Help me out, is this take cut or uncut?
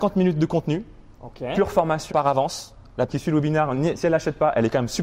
cut